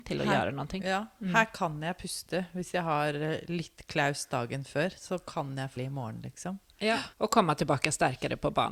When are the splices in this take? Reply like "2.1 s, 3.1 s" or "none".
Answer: 5.8 s, 7.1 s

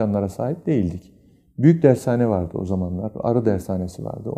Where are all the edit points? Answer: none

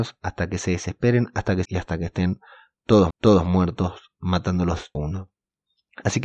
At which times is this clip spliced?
1.6 s, 3.1 s, 4.9 s

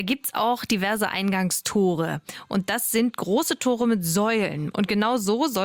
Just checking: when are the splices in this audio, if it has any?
none

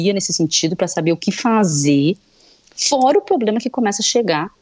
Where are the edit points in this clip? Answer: none

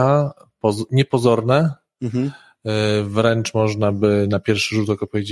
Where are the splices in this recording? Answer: none

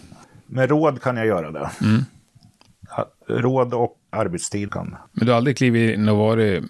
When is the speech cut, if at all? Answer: 4.1 s, 4.7 s

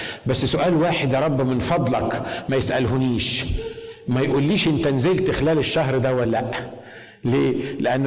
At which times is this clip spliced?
none

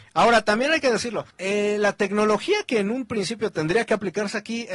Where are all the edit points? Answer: 1.3 s

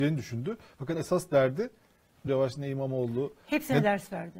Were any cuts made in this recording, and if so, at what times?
0.9 s, 2.3 s

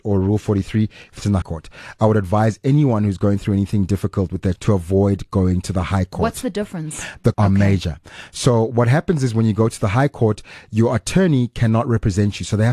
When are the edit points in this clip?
1.4 s, 4.6 s, 7.3 s

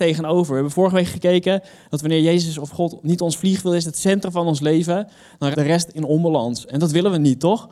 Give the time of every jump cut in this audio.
5.5 s

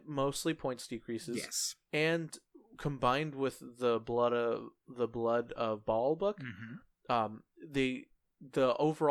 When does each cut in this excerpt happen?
none

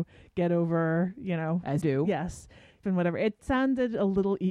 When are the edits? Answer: 1.8 s, 2.8 s, 3.4 s

